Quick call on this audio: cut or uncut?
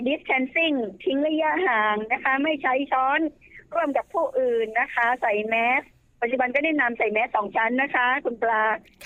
uncut